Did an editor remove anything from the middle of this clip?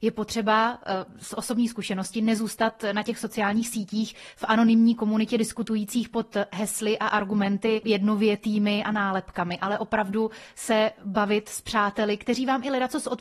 yes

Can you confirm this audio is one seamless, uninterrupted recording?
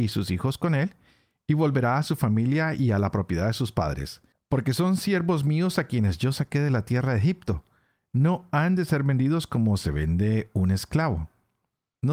no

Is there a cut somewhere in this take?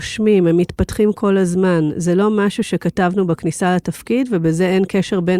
no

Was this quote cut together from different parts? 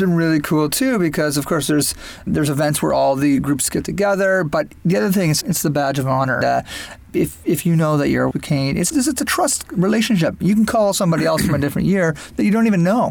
yes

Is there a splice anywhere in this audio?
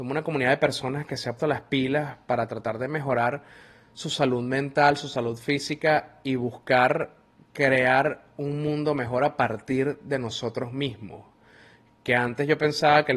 yes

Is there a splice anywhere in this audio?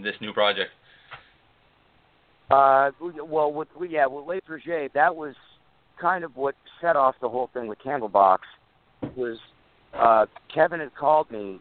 no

